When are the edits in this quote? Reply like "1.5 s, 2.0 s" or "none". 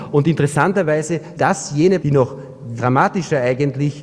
1.3 s, 2.0 s, 2.8 s